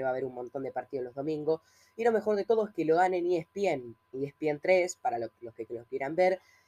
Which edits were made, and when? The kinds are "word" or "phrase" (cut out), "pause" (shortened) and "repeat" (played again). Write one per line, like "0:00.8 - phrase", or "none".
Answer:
none

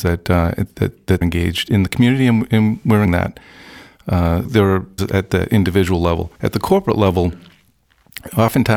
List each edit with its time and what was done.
0:01.2 - word
0:03.1 - word
0:04.5 - word
0:05.0 - phrase
0:06.4 - pause

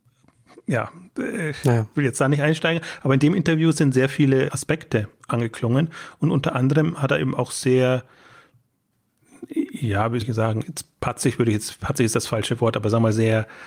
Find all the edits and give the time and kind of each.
0:04.5 - word
0:10.2 - word
0:10.6 - word

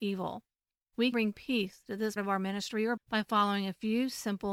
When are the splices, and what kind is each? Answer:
0:01.1 - word
0:02.2 - word
0:03.0 - word

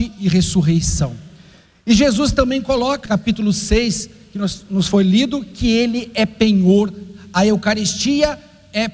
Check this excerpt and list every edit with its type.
0:03.1 - word

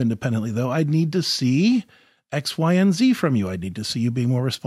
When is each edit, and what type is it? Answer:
none

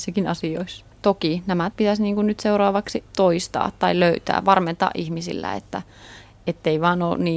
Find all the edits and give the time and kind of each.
0:00.9 - pause
0:01.7 - word
0:03.1 - pause

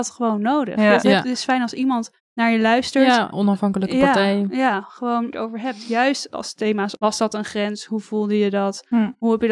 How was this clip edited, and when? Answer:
0:02.2 - pause
0:03.3 - word
0:05.3 - phrase
0:07.0 - word

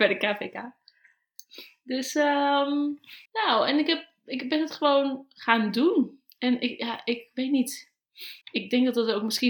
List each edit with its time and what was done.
0:03.3 - pause
0:08.4 - pause

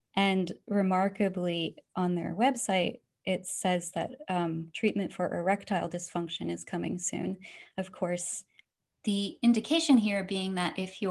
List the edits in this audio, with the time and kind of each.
none

